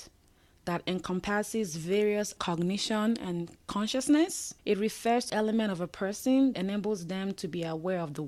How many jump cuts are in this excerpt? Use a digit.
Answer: 4